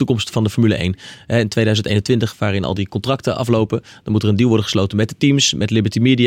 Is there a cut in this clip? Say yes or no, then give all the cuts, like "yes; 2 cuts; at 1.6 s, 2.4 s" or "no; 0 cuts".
no; 0 cuts